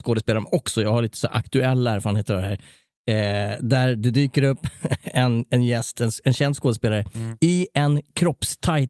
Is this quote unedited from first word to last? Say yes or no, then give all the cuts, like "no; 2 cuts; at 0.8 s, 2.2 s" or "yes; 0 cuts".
yes; 0 cuts